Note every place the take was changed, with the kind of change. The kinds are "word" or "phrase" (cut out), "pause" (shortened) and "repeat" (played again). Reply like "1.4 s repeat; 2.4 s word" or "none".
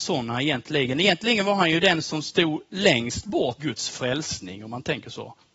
3.6 s word

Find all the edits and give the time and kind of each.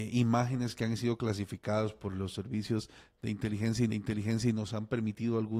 3.9 s repeat

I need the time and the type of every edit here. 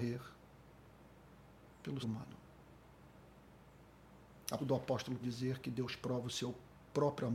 2.0 s word; 4.6 s word; 5.2 s word

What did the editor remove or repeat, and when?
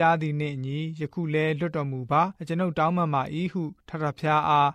2.4 s pause; 3.8 s pause

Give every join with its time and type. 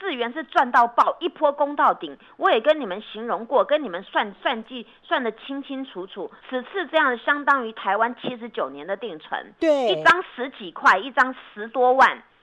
6.4 s pause

